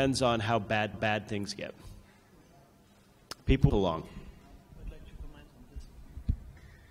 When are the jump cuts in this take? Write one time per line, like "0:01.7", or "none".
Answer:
0:00.9
0:03.7